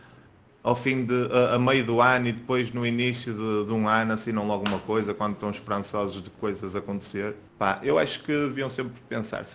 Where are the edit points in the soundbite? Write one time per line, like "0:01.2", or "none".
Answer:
0:07.5